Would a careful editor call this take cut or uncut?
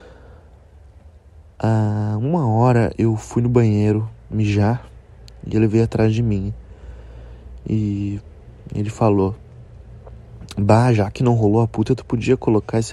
uncut